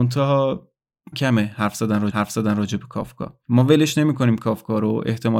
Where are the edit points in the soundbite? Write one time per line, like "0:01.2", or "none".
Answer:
0:01.1
0:02.1
0:03.4